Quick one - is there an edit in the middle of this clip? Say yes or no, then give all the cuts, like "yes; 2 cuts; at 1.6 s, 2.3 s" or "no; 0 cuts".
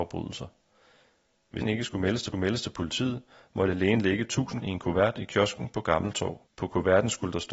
yes; 4 cuts; at 1.6 s, 2.3 s, 4.6 s, 6.5 s